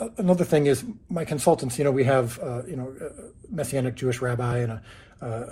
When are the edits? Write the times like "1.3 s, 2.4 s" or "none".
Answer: none